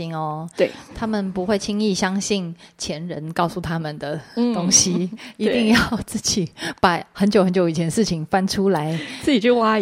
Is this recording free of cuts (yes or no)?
yes